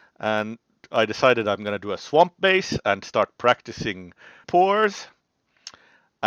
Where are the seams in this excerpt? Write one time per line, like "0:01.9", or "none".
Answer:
0:04.4